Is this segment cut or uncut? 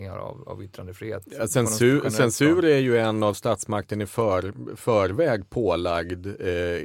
uncut